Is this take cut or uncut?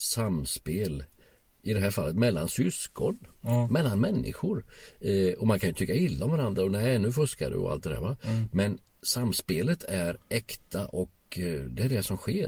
uncut